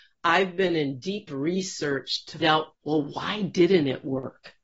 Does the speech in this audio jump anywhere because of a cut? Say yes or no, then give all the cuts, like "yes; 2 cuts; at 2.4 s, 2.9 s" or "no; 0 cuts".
yes; 3 cuts; at 1.3 s, 2.4 s, 2.7 s